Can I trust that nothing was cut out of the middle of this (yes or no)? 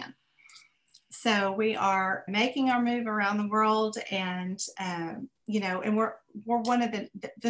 no